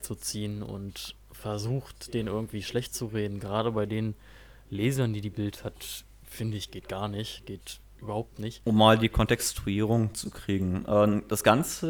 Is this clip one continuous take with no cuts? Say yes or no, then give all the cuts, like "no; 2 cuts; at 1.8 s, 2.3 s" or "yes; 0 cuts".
yes; 0 cuts